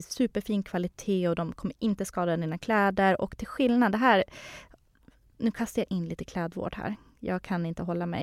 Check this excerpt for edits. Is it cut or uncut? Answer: uncut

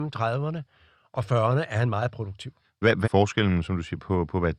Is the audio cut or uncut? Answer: cut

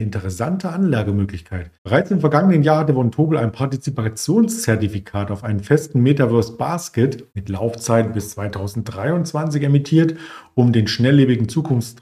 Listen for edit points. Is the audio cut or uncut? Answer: cut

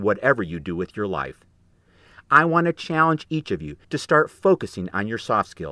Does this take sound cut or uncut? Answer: cut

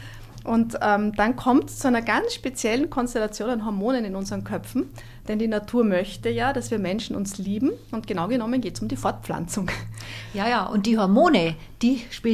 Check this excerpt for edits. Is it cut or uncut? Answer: uncut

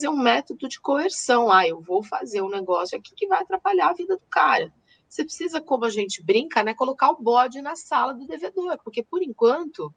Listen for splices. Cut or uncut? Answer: uncut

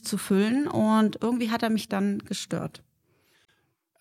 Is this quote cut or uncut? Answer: uncut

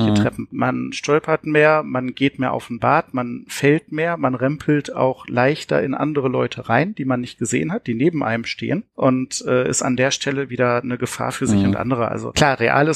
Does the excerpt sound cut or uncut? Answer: uncut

